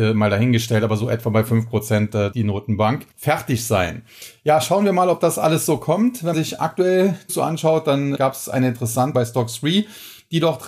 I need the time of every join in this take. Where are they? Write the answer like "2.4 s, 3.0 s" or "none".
2.3 s, 3.1 s, 6.3 s, 7.3 s, 8.1 s, 9.1 s